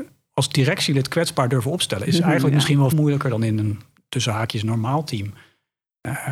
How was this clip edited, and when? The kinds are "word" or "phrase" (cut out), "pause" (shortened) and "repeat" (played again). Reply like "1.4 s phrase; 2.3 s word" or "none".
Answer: 2.9 s word